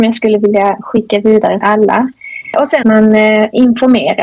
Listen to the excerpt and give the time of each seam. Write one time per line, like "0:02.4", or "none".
0:01.6
0:02.8